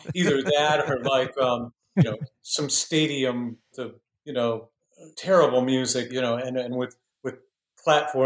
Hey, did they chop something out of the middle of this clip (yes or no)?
yes